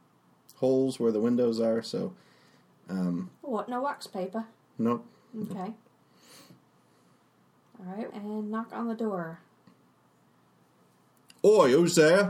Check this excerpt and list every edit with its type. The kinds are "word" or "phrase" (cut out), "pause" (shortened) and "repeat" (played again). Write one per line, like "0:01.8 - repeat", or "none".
0:08.1 - phrase